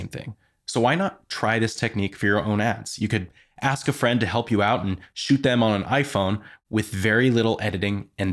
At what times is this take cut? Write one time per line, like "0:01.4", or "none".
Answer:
none